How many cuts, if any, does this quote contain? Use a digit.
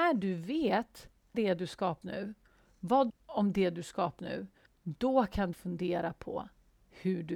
6